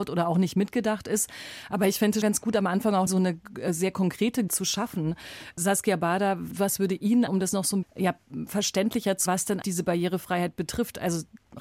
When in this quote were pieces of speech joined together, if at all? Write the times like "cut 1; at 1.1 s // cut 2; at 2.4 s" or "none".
cut 1; at 2.2 s // cut 2; at 3.1 s // cut 3; at 4.5 s // cut 4; at 7.3 s // cut 5; at 7.8 s // cut 6; at 9.3 s // cut 7; at 9.6 s